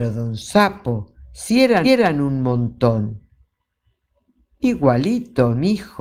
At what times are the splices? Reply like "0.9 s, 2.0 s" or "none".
1.8 s